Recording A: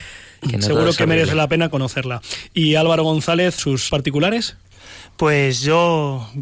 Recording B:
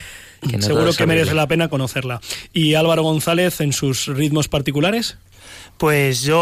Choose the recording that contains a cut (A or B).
A